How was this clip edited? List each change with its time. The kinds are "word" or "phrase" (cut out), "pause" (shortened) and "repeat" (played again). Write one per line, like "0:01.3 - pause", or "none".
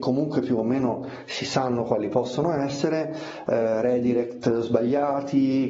none